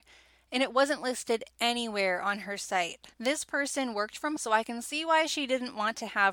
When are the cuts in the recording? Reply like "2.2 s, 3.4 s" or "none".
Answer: 3.1 s, 4.4 s